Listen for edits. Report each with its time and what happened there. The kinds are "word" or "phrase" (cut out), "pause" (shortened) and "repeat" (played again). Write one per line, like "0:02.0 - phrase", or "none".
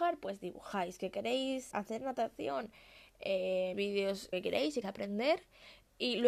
0:01.7 - word
0:03.7 - word
0:04.3 - word
0:04.8 - word

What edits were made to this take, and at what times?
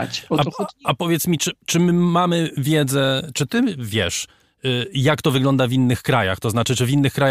none

